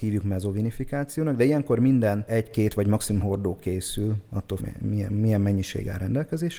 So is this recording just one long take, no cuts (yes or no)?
no